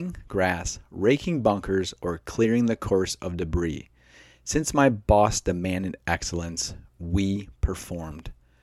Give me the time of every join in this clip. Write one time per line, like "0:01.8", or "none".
none